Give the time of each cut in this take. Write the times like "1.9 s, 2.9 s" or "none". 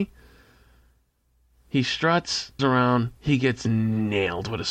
2.6 s, 3.2 s